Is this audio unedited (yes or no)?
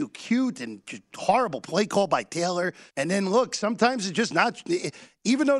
no